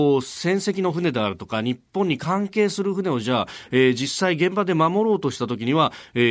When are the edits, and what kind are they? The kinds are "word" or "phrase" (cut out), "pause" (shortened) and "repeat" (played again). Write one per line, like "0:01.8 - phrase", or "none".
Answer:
none